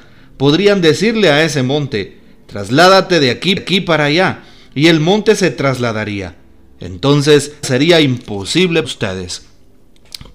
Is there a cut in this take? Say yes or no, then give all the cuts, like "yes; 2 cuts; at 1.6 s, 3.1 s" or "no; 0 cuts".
yes; 3 cuts; at 3.6 s, 7.6 s, 8.8 s